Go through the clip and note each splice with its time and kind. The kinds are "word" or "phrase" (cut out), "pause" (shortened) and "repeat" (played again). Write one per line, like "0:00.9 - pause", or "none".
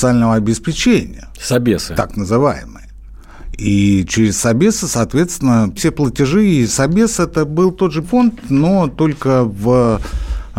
0:05.8 - word
0:08.0 - word